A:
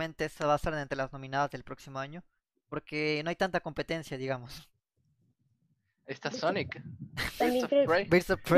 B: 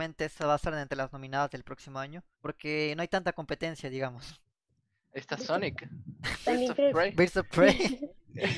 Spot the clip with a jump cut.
B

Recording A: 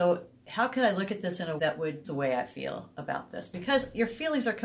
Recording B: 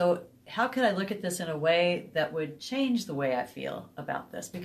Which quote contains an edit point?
A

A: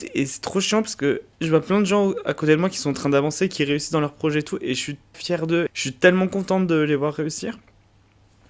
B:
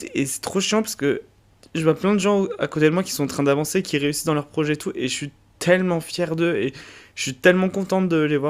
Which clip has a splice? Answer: A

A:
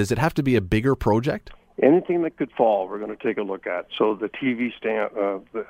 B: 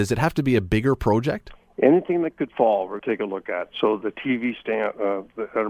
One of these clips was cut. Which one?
B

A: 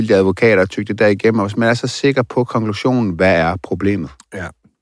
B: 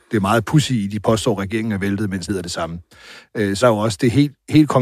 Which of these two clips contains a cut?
B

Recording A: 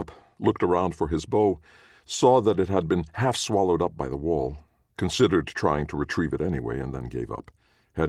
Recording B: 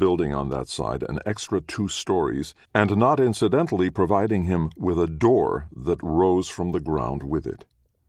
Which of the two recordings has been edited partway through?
B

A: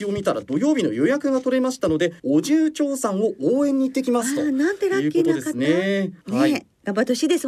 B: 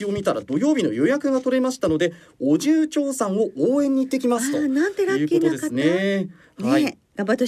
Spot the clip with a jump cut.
A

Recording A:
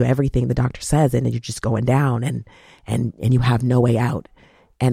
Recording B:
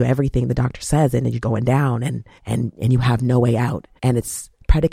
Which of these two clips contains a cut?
B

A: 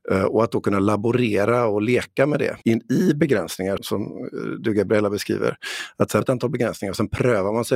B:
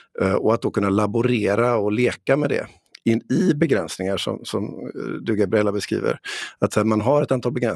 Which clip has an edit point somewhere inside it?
A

